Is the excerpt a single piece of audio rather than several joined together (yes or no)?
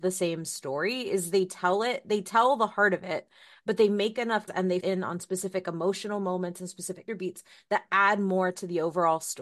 no